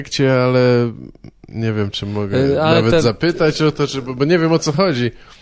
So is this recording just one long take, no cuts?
yes; 0 cuts

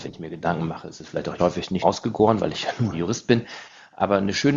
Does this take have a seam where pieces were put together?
yes; 3 cuts; at 1.4 s, 1.8 s, 2.9 s

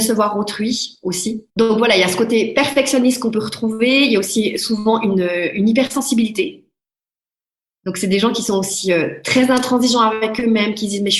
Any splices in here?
yes; 1 cut; at 1.5 s

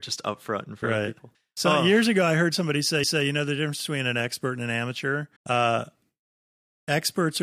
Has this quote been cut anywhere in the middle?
yes; 3 cuts; at 1.3 s, 3.0 s, 5.4 s

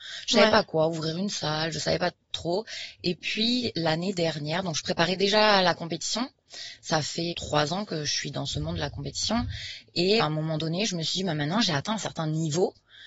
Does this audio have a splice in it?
yes; 2 cuts; at 7.3 s, 10.2 s

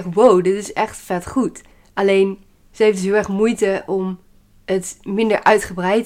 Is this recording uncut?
no; 1 cut; at 1.7 s

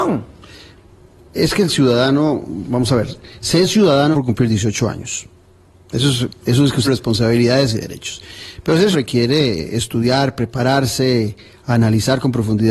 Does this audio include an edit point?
yes; 3 cuts; at 4.1 s, 6.8 s, 8.9 s

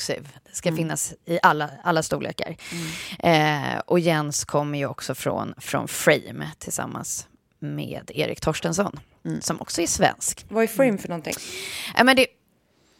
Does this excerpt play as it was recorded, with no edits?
yes; 0 cuts

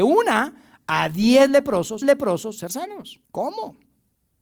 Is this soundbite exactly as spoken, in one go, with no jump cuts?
no; 2 cuts; at 2.0 s, 3.2 s

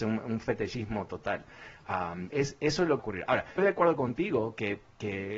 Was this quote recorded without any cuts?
no; 3 cuts; at 2.3 s, 3.0 s, 3.6 s

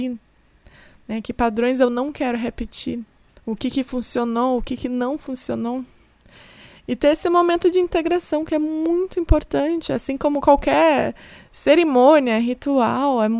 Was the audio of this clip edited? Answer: no; 0 cuts

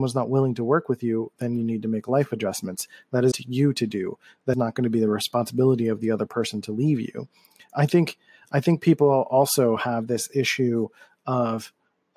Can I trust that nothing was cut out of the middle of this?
no; 2 cuts; at 3.3 s, 4.5 s

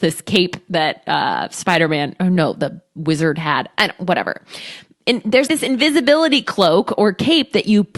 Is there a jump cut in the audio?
yes; 1 cut; at 5.5 s

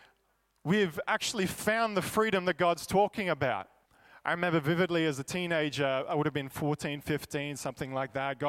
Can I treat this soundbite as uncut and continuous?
no; 1 cut; at 3.9 s

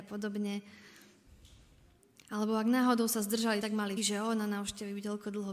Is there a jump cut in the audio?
yes; 2 cuts; at 3.6 s, 4.0 s

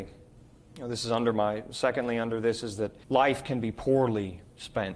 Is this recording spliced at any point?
yes; 1 cut; at 3.0 s

